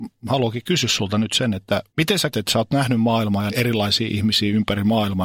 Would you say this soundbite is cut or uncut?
cut